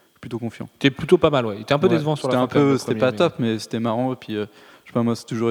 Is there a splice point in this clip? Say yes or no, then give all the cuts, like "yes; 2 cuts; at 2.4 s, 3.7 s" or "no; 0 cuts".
no; 0 cuts